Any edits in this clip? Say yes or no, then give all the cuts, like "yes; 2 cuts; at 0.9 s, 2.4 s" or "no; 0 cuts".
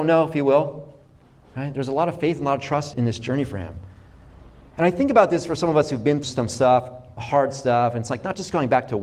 yes; 3 cuts; at 2.9 s, 6.2 s, 7.2 s